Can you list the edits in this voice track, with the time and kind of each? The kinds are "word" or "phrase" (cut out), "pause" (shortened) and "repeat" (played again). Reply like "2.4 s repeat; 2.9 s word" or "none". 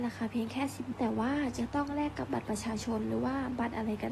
0.9 s phrase